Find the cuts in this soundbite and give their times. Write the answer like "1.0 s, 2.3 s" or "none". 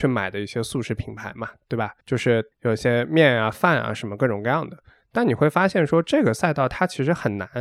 2.0 s, 2.5 s